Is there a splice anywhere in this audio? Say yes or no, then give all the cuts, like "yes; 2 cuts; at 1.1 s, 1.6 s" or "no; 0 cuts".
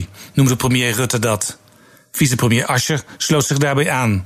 no; 0 cuts